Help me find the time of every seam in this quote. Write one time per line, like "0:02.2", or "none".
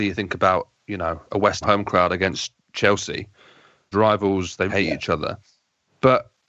0:01.3
0:01.6
0:03.9
0:04.7